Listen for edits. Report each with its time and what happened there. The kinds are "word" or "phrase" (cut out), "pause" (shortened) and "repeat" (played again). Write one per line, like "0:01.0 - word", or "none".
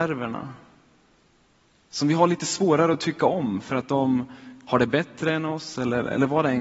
none